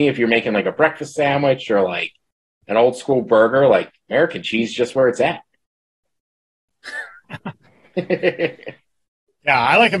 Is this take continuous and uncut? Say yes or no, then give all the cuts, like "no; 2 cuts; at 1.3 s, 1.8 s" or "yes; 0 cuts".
yes; 0 cuts